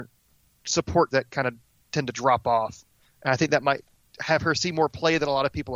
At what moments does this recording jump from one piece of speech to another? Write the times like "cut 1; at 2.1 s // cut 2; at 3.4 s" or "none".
cut 1; at 1.1 s